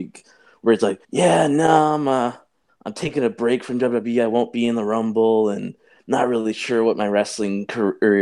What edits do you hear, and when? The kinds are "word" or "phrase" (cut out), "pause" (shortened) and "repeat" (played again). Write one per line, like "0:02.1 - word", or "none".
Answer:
0:01.0 - pause

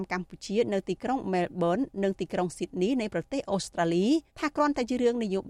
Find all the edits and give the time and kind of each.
0:04.3 - pause

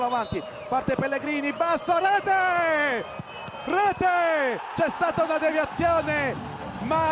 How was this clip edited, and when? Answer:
none

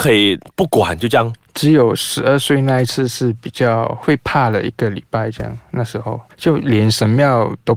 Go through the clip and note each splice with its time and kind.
0:06.3 - word

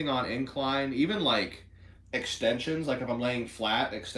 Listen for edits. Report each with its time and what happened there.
none

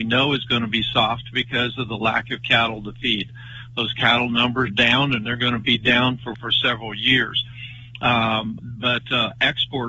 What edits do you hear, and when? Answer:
0:04.7 - word
0:06.3 - word
0:08.6 - word

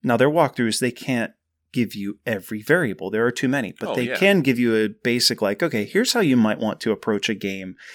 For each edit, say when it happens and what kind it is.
none

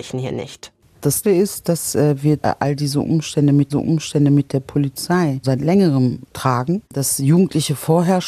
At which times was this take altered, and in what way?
0:01.2 - word
0:02.4 - word
0:03.7 - repeat
0:05.4 - word
0:06.8 - pause

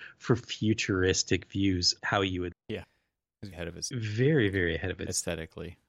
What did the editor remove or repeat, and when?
0:02.0 - word
0:02.5 - word
0:03.5 - word
0:03.9 - word

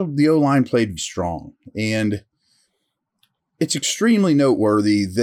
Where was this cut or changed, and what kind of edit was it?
0:01.0 - word

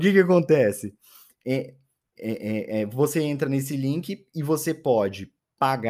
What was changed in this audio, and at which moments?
none

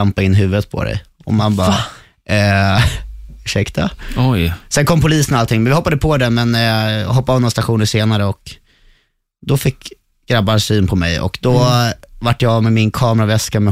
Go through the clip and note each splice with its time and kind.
none

